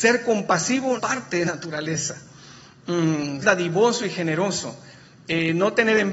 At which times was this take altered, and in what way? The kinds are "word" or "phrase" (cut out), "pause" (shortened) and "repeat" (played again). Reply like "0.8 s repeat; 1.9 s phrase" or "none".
1.0 s phrase; 1.4 s word; 3.4 s word